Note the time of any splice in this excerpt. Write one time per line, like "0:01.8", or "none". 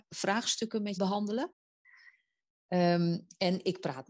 0:01.0